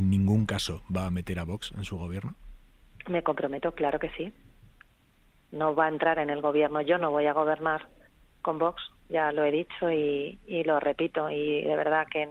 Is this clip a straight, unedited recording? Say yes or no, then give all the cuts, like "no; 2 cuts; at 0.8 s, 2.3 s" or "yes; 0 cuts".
yes; 0 cuts